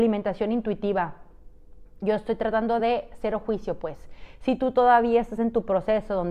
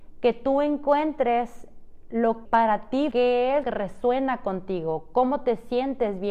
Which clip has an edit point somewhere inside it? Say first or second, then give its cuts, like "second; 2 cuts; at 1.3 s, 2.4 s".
second; 3 cuts; at 2.5 s, 3.1 s, 3.6 s